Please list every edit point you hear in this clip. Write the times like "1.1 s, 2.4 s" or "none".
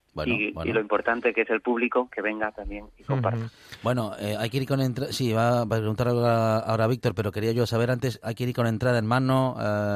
none

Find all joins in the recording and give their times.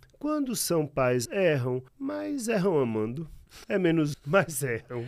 1.2 s, 1.9 s, 3.6 s, 4.1 s

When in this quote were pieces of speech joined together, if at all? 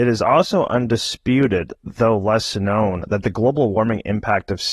none

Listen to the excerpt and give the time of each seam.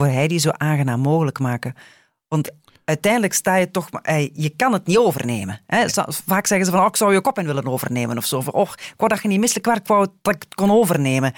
none

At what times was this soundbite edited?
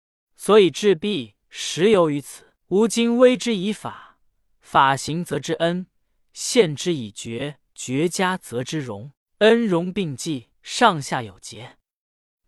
1.4 s, 2.6 s, 7.7 s, 9.2 s, 10.5 s

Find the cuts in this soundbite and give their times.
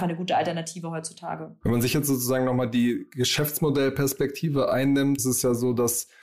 5.2 s

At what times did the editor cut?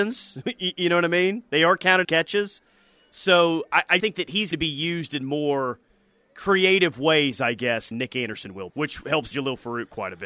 2.0 s, 4.0 s, 4.5 s, 7.9 s, 8.7 s, 9.3 s

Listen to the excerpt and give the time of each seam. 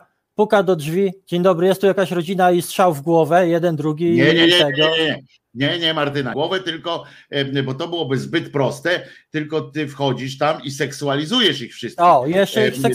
6.3 s

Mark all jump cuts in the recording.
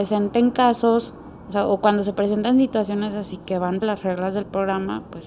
3.8 s

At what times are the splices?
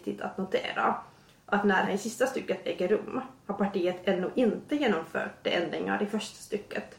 1.9 s

